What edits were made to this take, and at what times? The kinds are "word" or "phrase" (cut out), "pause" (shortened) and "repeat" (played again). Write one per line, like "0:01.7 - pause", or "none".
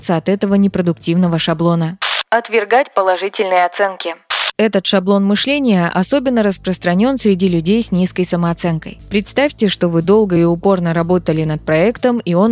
none